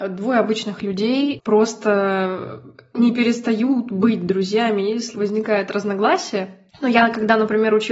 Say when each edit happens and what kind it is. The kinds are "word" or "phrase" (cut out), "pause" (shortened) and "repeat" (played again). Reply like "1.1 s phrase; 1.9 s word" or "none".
5.1 s phrase; 6.7 s pause